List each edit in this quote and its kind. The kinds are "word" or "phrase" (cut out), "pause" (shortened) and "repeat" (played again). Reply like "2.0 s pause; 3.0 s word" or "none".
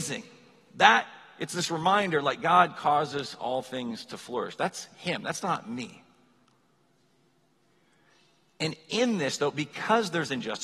none